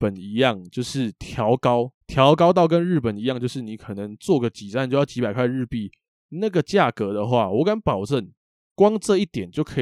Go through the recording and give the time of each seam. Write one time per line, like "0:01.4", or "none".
0:02.0